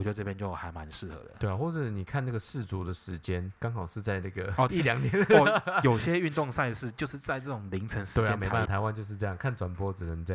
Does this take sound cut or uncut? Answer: cut